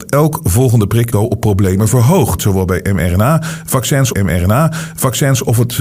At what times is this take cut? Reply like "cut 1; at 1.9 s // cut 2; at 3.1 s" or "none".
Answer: cut 1; at 1.1 s // cut 2; at 4.1 s